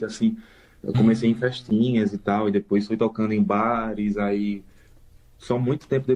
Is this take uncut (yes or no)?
yes